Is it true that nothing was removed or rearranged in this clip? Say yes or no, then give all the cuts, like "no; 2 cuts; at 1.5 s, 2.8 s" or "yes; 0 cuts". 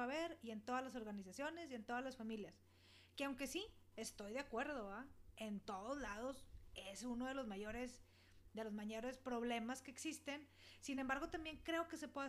yes; 0 cuts